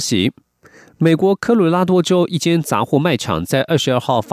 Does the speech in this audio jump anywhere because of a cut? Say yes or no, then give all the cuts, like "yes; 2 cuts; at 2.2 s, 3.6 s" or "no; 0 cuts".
no; 0 cuts